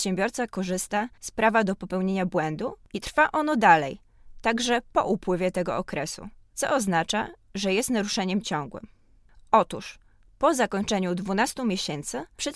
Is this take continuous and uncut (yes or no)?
yes